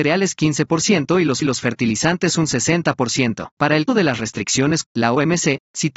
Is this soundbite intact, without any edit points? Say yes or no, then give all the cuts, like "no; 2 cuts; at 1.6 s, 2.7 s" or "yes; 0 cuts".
no; 4 cuts; at 1.4 s, 3.5 s, 3.9 s, 4.8 s